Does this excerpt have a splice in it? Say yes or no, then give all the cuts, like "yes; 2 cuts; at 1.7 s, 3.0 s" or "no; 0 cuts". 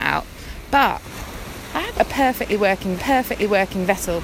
yes; 2 cuts; at 1.9 s, 3.0 s